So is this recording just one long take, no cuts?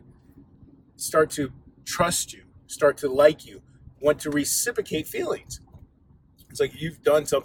yes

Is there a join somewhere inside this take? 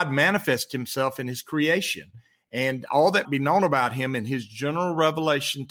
yes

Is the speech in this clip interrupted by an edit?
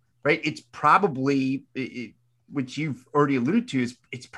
no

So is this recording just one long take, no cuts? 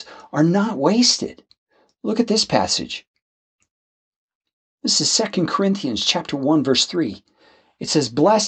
yes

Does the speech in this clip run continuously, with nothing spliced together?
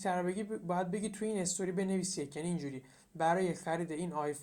yes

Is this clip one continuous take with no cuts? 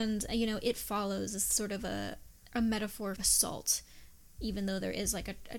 no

